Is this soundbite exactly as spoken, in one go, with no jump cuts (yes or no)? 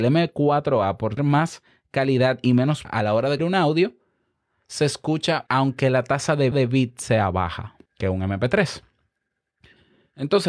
no